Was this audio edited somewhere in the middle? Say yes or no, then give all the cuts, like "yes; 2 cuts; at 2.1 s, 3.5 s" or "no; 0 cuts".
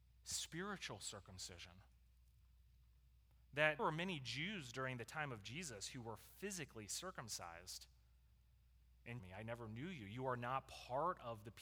yes; 2 cuts; at 3.8 s, 9.2 s